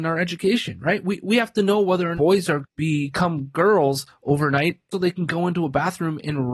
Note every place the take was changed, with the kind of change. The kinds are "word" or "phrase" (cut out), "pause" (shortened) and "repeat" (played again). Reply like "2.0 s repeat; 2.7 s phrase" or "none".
2.2 s word; 2.6 s word; 4.9 s word